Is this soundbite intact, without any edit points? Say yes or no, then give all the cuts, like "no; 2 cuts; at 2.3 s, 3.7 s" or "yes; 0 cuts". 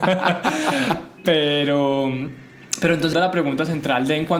no; 1 cut; at 3.1 s